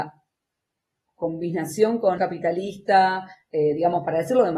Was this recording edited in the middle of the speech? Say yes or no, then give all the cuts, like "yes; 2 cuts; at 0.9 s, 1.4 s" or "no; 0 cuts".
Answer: yes; 1 cut; at 2.2 s